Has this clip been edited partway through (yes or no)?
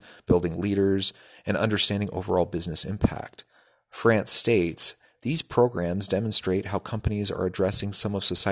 no